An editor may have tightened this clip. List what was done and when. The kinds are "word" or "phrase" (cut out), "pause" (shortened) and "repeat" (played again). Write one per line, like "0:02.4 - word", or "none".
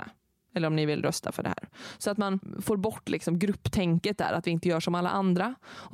none